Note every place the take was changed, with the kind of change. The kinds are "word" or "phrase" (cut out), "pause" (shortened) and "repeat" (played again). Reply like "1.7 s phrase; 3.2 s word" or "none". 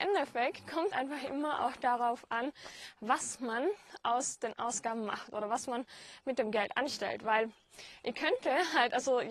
0.9 s phrase